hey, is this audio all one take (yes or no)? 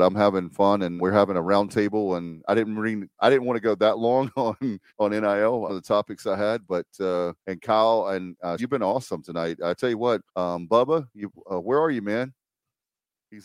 no